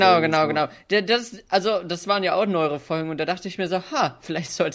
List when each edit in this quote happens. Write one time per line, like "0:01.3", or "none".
none

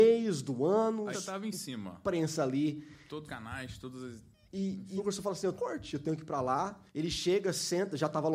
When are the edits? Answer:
0:01.1
0:03.3
0:05.0
0:05.5
0:06.9

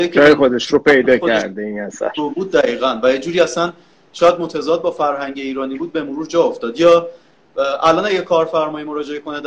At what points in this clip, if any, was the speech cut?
none

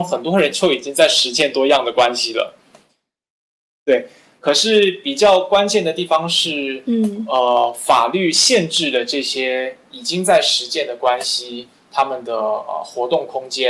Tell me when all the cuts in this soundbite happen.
none

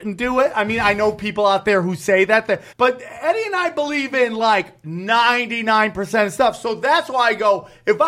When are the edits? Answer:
0:02.7

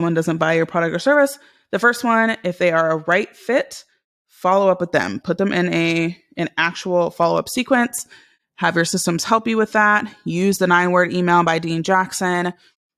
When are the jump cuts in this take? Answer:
none

